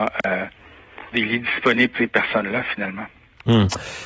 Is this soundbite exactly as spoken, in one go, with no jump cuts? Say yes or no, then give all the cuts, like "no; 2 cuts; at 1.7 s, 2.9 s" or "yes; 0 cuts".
no; 2 cuts; at 1.1 s, 1.9 s